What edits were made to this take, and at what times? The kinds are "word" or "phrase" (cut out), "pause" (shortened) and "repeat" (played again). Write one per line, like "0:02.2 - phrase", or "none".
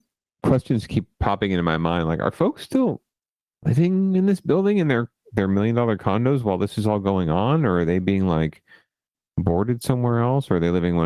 none